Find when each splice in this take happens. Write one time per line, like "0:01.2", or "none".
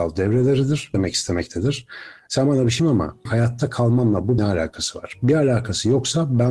0:00.9
0:02.8
0:03.2
0:04.4

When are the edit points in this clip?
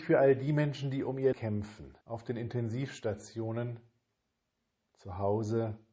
0:01.3
0:02.0

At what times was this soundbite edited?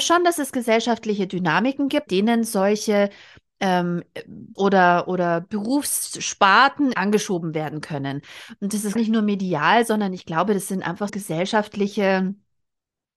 0:02.1
0:04.6
0:06.9
0:09.0
0:11.1

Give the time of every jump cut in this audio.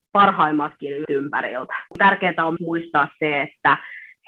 0:01.0
0:01.9
0:02.6

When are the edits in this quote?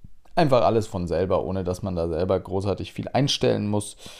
none

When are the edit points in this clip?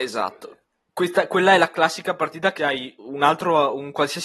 0:02.6
0:03.0

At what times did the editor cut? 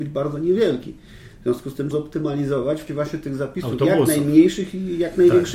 0:01.9
0:02.9

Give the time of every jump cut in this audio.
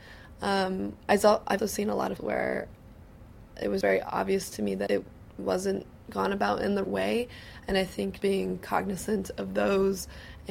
0:01.6
0:02.2
0:03.8
0:04.9
0:06.8
0:08.2

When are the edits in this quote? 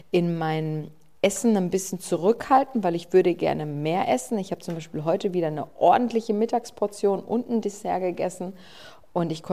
none

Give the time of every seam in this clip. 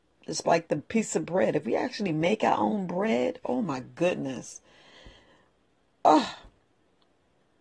none

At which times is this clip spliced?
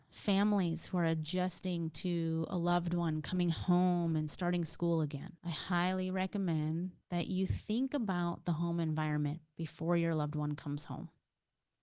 0:05.4

